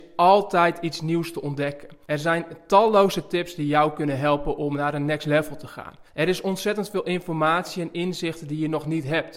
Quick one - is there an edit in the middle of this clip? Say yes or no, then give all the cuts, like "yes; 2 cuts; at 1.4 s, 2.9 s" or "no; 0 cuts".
yes; 2 cuts; at 2.0 s, 6.1 s